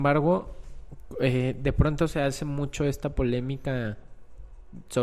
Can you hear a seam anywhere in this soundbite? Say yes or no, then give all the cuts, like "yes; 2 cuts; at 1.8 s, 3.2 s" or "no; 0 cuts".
no; 0 cuts